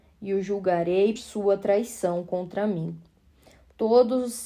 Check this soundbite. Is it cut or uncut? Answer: cut